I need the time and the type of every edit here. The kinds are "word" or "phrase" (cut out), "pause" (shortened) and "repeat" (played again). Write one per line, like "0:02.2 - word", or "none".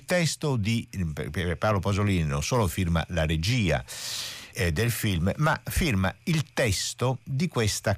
0:04.5 - word